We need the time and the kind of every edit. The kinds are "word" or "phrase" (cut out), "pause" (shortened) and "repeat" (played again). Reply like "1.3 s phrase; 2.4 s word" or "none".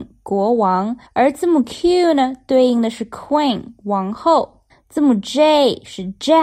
1.1 s pause; 4.7 s pause